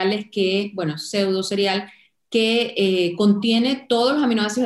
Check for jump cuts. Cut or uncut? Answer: uncut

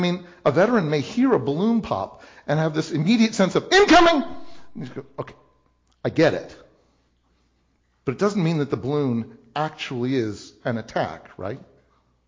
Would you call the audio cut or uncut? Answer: uncut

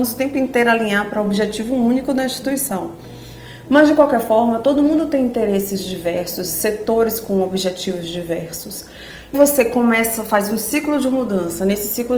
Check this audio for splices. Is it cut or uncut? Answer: cut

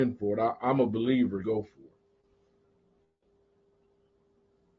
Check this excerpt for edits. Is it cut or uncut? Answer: cut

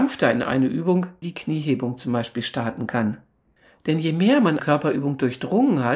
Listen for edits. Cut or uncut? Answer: cut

